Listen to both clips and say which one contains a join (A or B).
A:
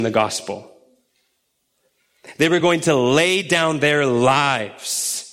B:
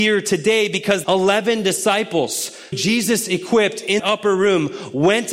B